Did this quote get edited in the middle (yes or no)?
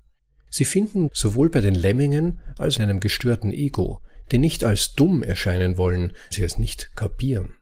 yes